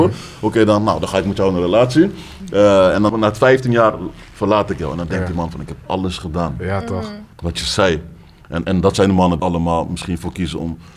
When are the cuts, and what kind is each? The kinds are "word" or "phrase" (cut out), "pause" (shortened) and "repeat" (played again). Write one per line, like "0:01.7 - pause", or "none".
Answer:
0:03.1 - word
0:07.3 - pause
0:08.6 - word
0:09.4 - phrase